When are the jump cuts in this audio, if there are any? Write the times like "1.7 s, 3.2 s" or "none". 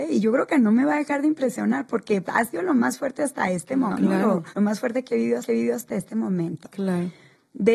2.2 s, 3.9 s, 4.5 s, 5.4 s